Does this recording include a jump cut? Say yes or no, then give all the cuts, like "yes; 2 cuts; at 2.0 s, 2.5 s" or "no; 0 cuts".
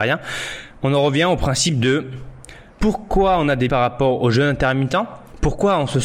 yes; 2 cuts; at 2.7 s, 3.7 s